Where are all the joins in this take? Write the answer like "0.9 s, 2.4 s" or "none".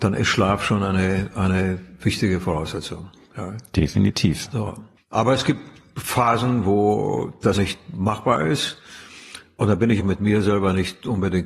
7.5 s, 10.0 s